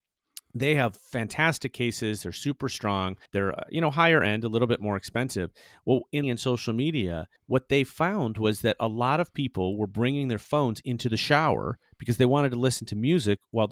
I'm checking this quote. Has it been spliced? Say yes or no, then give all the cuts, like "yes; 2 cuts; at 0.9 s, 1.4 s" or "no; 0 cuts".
yes; 3 cuts; at 3.3 s, 6.2 s, 7.4 s